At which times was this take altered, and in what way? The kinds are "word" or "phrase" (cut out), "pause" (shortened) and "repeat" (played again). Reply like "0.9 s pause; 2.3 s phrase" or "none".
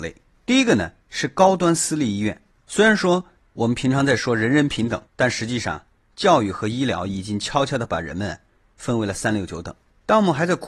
1.0 s pause; 5.1 s pause

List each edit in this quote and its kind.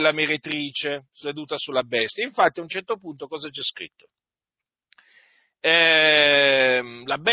none

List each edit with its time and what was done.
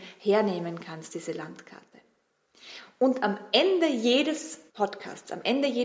4.7 s pause

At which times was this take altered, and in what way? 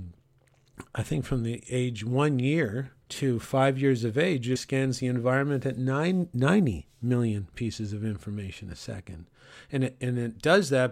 3.0 s pause; 4.6 s word

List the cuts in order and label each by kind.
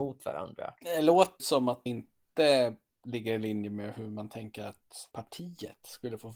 1.4 s word; 1.9 s word; 5.1 s pause

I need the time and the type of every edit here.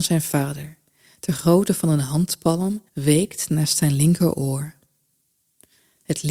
2.9 s pause

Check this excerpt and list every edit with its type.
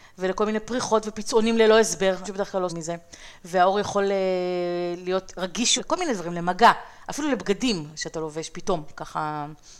2.2 s word; 2.7 s word; 5.8 s word

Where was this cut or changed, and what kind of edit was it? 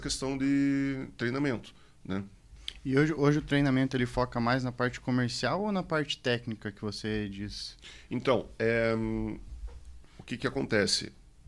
none

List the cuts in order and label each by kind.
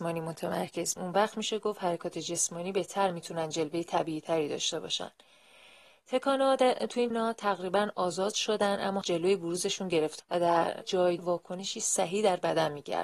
1.0 s word; 7.1 s word; 9.0 s word; 10.2 s word; 10.8 s word; 11.2 s word

